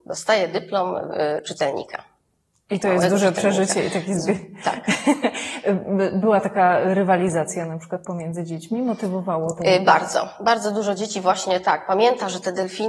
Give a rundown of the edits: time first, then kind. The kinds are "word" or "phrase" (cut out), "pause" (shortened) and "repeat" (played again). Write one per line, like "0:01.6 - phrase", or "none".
none